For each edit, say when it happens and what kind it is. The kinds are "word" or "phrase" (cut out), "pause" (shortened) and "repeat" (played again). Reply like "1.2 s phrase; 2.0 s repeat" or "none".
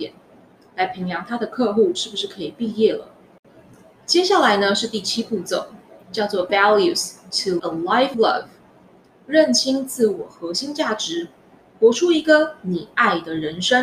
6.5 s word; 7.6 s word; 8.1 s word